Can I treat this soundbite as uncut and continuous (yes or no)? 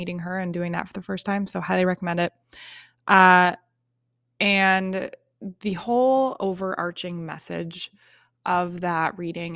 yes